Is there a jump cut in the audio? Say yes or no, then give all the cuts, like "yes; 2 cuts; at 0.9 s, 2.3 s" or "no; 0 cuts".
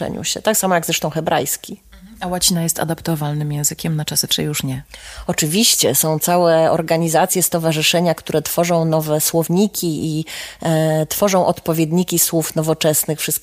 yes; 1 cut; at 4.3 s